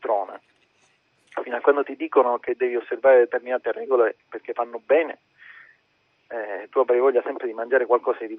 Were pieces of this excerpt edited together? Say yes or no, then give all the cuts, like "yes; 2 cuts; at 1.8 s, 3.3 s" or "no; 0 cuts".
no; 0 cuts